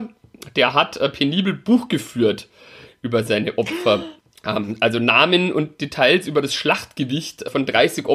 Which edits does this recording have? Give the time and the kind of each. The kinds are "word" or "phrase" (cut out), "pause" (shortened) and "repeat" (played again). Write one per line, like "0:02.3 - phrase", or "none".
none